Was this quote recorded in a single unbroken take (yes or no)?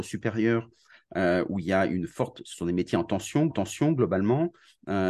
no